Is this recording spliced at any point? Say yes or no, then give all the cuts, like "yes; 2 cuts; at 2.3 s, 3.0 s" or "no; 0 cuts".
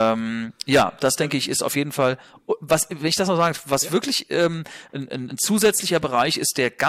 no; 0 cuts